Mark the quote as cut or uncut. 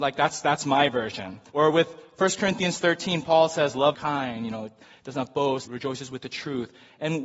cut